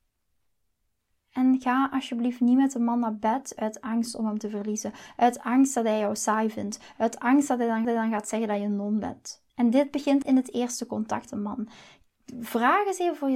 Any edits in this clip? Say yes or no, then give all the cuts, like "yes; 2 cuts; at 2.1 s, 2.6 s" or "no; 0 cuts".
yes; 4 cuts; at 7.8 s, 9.5 s, 10.2 s, 11.3 s